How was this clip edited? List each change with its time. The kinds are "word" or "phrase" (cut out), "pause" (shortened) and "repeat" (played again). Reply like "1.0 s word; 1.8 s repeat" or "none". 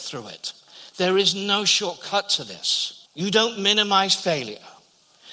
3.1 s pause